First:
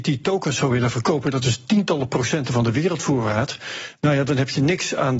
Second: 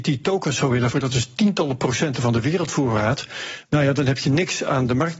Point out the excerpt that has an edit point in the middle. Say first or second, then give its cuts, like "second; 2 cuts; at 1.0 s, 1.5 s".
second; 1 cut; at 0.9 s